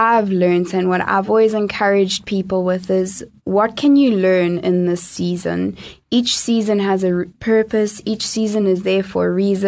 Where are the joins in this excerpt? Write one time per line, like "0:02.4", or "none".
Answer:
none